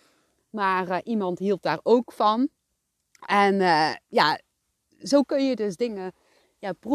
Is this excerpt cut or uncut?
uncut